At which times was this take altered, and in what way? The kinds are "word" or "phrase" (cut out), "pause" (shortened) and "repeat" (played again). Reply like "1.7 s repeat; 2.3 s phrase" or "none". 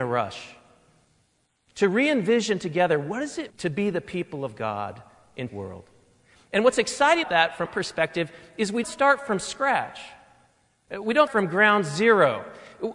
3.5 s word; 5.5 s word; 7.2 s word; 7.7 s word; 8.8 s word; 11.3 s word